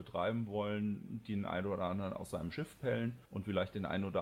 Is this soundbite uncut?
no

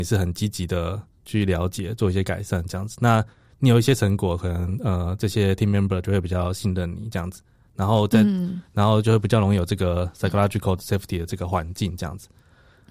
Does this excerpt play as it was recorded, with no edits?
yes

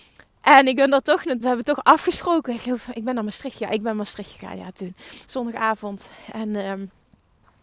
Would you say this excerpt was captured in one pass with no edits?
no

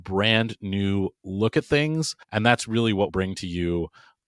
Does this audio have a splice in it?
yes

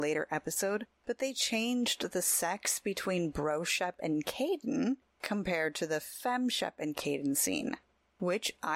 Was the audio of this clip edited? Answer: no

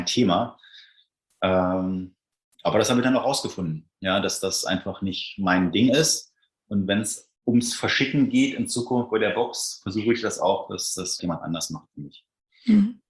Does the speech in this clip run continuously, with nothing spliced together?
no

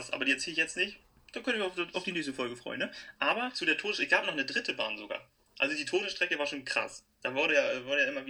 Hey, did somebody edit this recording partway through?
no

